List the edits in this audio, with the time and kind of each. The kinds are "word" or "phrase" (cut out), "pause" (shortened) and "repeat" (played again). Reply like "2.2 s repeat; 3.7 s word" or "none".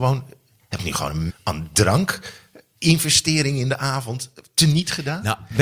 1.3 s word

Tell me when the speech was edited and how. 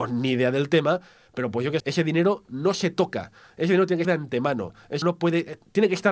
1.8 s word; 4.0 s word; 5.0 s word

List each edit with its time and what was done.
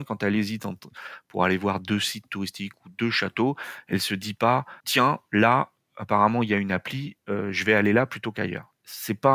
4.8 s pause

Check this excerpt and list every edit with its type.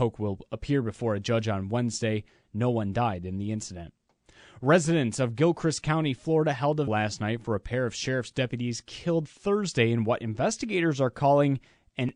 6.9 s word

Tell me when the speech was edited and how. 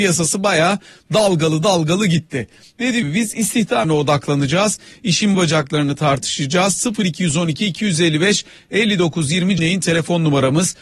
3.0 s word; 3.8 s word; 5.3 s word; 9.6 s word

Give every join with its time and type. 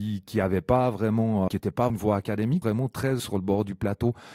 1.5 s word; 1.9 s word; 2.6 s phrase; 3.2 s word

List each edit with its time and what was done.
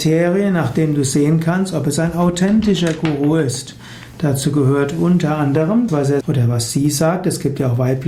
5.9 s phrase; 6.2 s word

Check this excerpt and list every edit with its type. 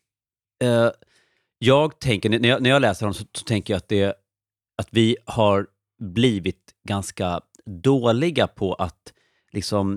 none

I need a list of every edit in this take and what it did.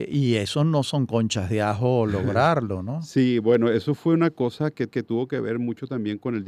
4.9 s repeat

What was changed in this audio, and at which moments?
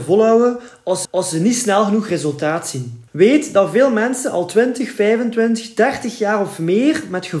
1.0 s repeat; 3.1 s pause

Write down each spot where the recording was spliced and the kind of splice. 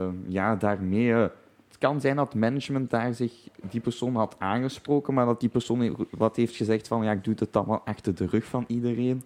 none

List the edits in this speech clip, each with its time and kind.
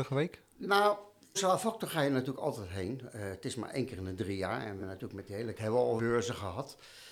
1.4 s word; 4.8 s word; 5.6 s word; 6.0 s word

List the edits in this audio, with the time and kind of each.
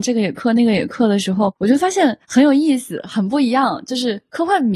2.2 s pause

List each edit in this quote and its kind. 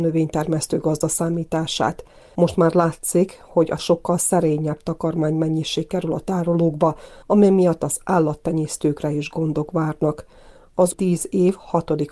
3.8 s word; 7.2 s pause; 10.9 s word

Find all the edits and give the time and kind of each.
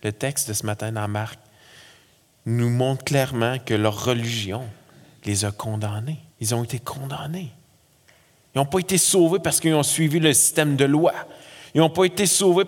6.3 s pause

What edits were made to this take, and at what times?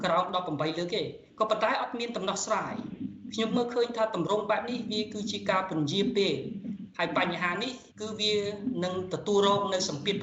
1.3 s pause; 7.9 s pause

